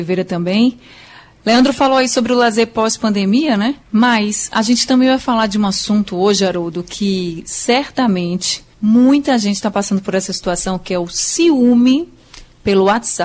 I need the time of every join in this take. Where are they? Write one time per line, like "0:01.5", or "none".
0:03.8
0:08.7

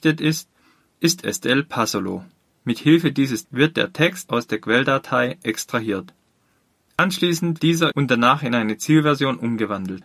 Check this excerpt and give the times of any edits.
0:02.5
0:03.4
0:07.6
0:07.9

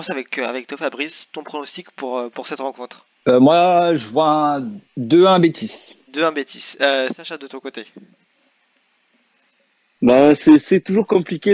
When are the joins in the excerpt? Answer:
0:03.1
0:04.9
0:06.1

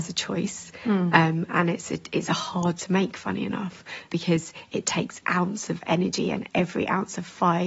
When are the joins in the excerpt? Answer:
0:02.8
0:04.1
0:05.2

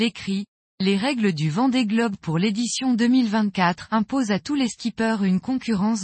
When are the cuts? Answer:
none

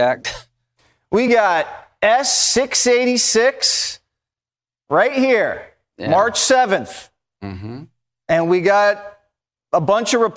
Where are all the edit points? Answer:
none

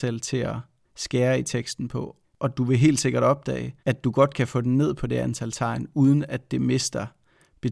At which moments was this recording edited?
0:02.2
0:03.8

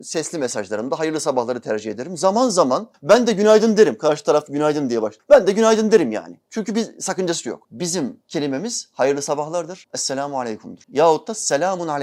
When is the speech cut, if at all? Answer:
none

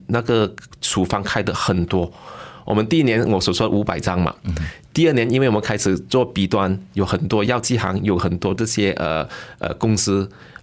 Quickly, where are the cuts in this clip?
none

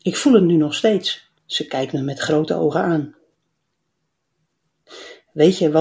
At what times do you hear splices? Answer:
0:01.4

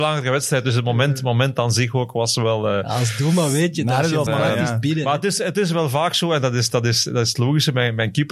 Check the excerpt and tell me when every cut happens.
0:04.3

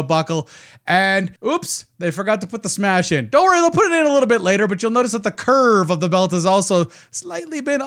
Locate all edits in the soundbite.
0:01.4

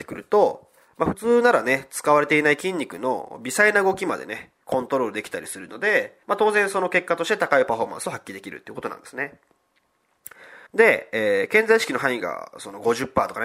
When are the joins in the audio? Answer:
0:06.2
0:10.7

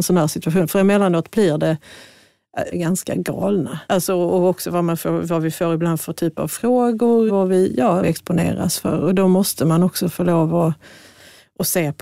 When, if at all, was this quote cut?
0:02.7
0:03.9
0:07.3
0:08.0

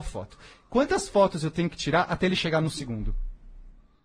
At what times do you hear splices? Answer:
none

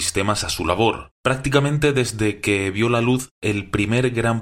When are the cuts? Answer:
0:01.2

